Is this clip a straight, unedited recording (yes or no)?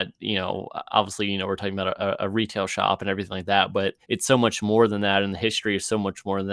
no